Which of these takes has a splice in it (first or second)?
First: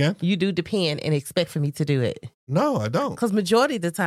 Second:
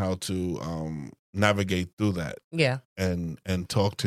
first